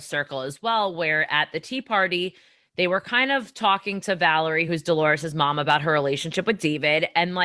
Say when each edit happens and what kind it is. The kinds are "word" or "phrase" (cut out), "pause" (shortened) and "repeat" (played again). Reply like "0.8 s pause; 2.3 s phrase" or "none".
none